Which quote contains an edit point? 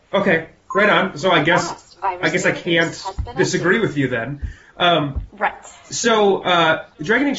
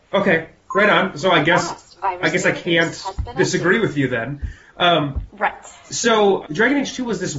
second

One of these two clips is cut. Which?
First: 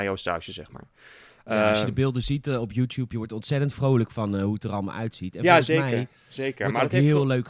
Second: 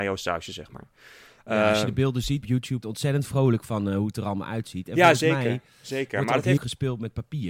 second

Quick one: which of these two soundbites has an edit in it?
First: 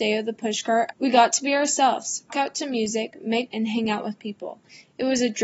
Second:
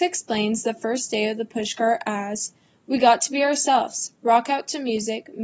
first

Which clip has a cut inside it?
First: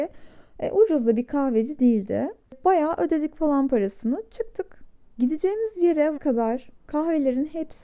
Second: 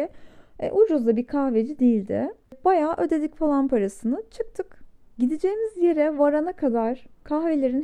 first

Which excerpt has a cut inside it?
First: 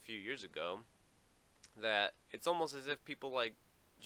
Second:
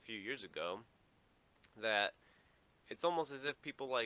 first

